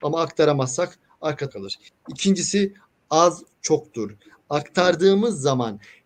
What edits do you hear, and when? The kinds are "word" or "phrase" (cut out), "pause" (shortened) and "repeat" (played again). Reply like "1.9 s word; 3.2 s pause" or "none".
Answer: 1.5 s word